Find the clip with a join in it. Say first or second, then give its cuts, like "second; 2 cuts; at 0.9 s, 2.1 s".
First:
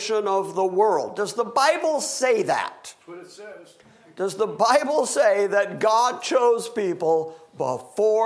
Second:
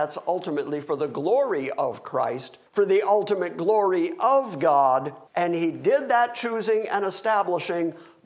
second; 2 cuts; at 2.7 s, 5.3 s